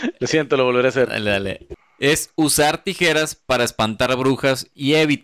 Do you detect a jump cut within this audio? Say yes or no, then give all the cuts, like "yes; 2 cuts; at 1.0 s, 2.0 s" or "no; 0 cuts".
no; 0 cuts